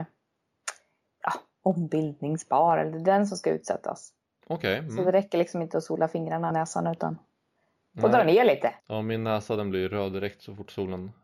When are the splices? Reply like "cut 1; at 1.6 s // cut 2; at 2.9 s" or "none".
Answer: cut 1; at 6.5 s // cut 2; at 8.8 s